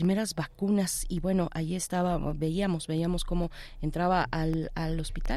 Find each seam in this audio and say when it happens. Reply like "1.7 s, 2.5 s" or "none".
none